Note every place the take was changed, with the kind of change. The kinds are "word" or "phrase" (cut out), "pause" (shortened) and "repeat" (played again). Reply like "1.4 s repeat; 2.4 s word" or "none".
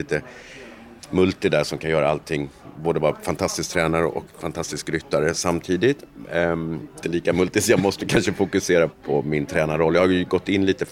1.0 s pause; 7.0 s phrase; 8.9 s word

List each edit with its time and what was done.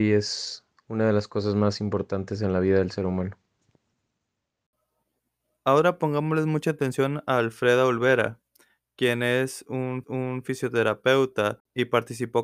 10.0 s repeat

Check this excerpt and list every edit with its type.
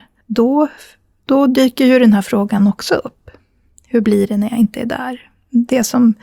none

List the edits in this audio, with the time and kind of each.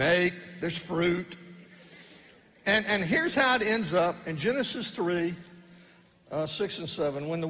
none

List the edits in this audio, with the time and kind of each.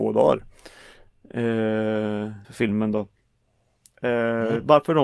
2.4 s word

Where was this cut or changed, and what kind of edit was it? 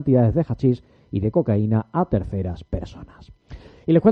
none

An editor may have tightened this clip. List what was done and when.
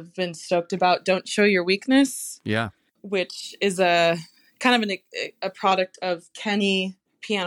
none

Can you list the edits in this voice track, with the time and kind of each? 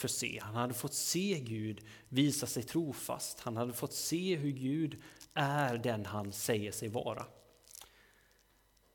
none

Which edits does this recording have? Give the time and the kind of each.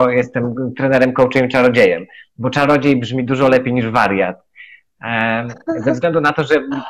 none

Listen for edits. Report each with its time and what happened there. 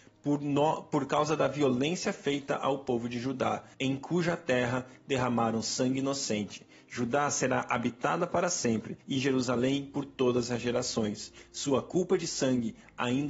3.7 s pause; 9.0 s pause

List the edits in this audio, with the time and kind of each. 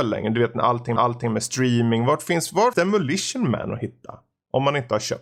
1.0 s repeat; 2.7 s word

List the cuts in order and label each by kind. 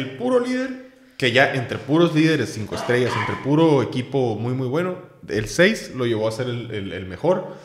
none

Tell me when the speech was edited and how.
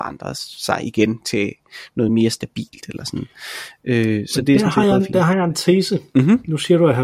none

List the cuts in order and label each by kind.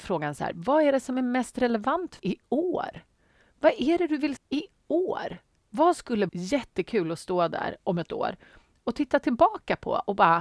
2.2 s word; 4.4 s word; 6.3 s word

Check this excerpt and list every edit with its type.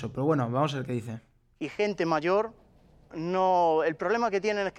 3.1 s word

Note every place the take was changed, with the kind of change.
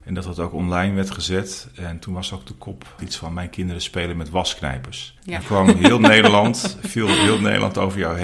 3.0 s word; 5.4 s word

